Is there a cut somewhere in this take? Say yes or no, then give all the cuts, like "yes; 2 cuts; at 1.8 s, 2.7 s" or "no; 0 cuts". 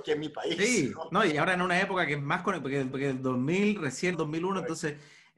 yes; 3 cuts; at 1.3 s, 2.9 s, 4.1 s